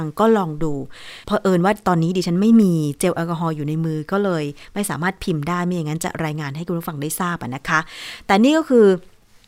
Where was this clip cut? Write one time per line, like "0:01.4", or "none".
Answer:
0:01.2